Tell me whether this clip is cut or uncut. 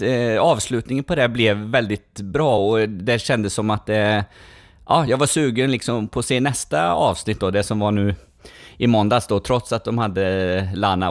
uncut